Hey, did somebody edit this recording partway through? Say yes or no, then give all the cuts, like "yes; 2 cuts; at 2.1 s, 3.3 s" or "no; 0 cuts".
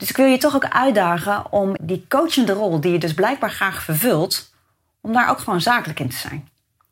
yes; 1 cut; at 1.8 s